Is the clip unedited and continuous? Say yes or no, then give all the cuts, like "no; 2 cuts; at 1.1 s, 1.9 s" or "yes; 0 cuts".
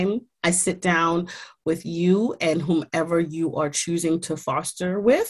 yes; 0 cuts